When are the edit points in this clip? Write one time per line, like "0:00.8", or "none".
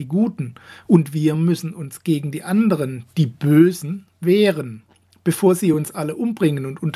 none